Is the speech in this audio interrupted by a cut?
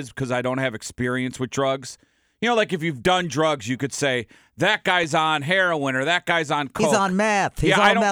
no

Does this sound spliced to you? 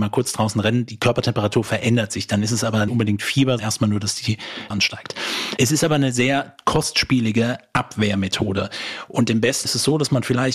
yes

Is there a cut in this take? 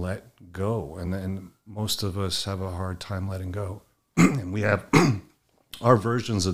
no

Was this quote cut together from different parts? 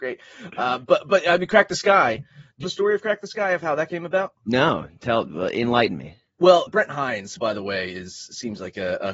yes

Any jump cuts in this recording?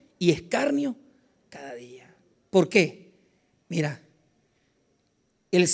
no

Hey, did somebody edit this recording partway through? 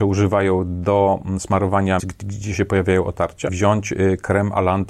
yes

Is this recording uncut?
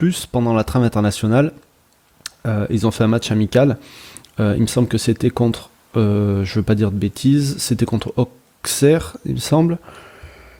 yes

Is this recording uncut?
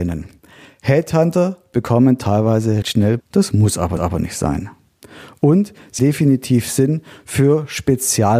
no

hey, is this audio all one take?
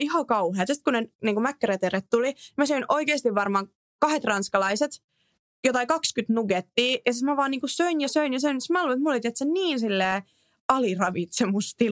yes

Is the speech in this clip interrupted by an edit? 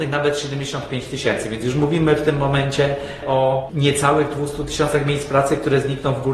no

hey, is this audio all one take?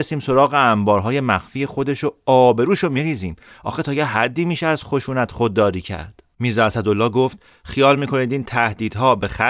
yes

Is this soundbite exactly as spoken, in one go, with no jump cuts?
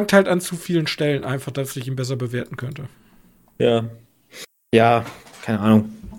yes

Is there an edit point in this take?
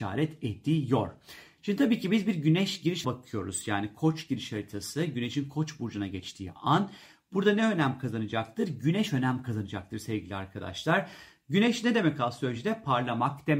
yes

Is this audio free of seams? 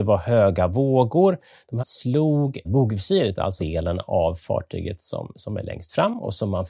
no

